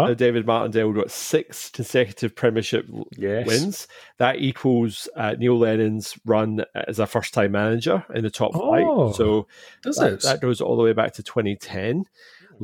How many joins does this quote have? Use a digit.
0